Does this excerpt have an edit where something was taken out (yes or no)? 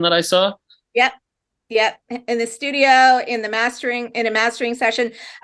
no